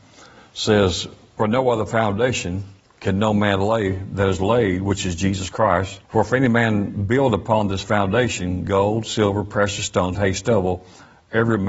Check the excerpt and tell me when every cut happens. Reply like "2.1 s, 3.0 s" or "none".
1.4 s, 2.8 s, 6.0 s, 10.1 s

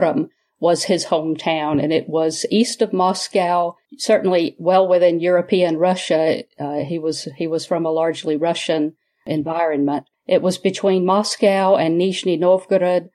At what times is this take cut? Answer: none

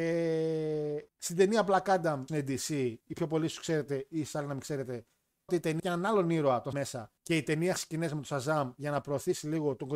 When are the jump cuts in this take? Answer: 1.1 s, 2.3 s, 3.0 s, 5.5 s, 5.8 s, 6.7 s, 7.2 s, 7.8 s

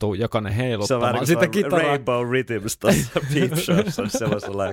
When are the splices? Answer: none

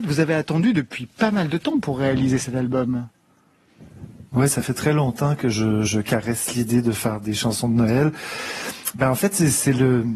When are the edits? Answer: 4.3 s, 5.8 s

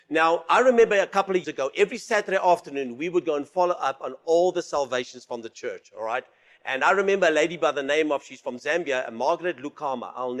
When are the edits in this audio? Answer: 1.4 s

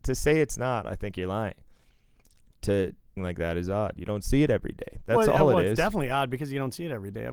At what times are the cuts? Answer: 3.2 s

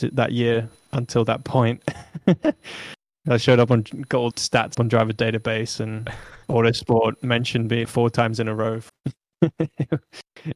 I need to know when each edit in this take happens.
4.3 s, 4.7 s, 6.4 s, 7.8 s, 8.9 s

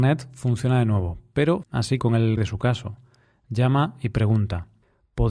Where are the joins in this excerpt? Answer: 1.6 s, 2.0 s, 2.4 s

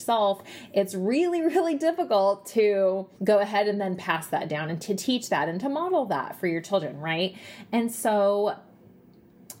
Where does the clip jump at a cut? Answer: 3.1 s

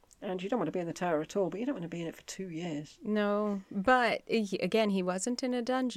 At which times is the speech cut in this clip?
none

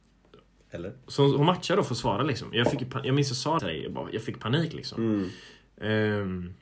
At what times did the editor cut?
3.6 s

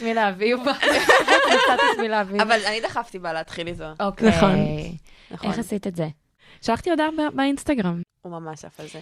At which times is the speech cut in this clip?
none

